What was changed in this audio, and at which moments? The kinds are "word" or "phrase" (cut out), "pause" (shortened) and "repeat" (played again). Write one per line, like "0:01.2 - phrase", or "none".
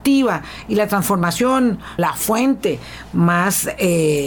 0:02.0 - phrase